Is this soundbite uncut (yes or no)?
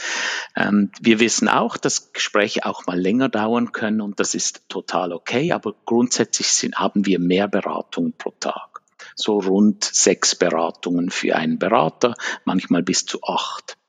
yes